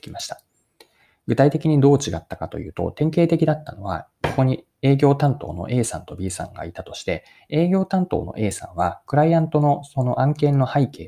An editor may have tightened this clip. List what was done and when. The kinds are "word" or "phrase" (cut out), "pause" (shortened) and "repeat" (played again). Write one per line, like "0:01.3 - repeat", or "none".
none